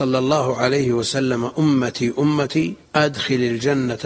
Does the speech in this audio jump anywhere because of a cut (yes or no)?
yes